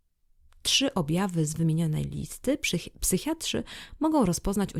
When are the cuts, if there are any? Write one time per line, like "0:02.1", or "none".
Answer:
none